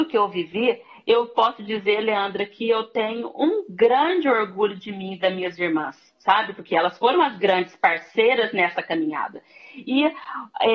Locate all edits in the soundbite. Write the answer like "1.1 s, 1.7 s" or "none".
none